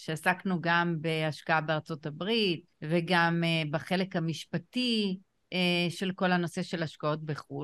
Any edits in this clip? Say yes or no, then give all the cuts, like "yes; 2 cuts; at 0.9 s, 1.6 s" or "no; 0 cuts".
yes; 1 cut; at 2.7 s